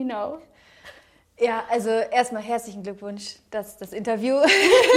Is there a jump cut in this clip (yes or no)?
no